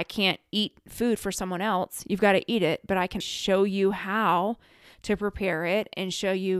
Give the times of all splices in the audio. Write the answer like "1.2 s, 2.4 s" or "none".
3.2 s